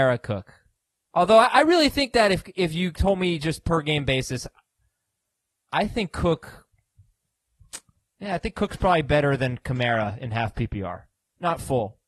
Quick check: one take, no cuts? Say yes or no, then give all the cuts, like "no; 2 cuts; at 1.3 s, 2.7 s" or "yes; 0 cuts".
yes; 0 cuts